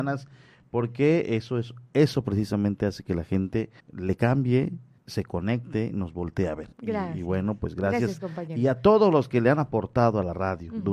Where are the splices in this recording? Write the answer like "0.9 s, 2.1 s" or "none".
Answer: 1.9 s, 3.8 s, 5.0 s, 6.7 s

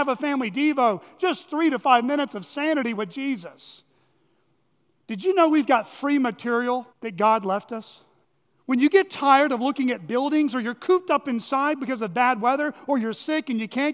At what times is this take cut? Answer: 6.9 s, 8.2 s

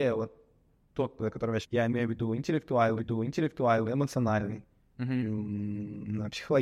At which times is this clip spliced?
1.2 s, 1.6 s, 3.0 s

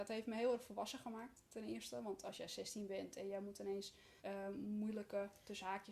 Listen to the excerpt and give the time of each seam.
4.2 s

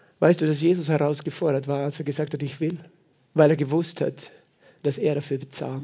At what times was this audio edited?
3.1 s

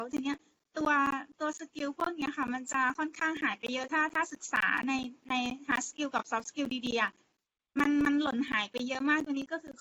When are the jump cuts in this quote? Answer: none

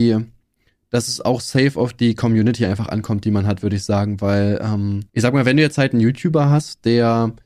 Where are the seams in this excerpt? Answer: 5.1 s

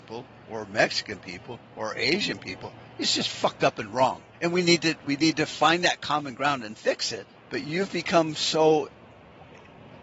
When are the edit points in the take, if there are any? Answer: 4.3 s, 7.4 s

